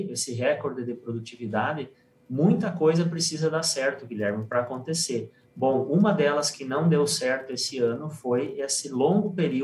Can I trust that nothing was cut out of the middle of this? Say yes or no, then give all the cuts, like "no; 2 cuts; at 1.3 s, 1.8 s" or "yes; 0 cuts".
yes; 0 cuts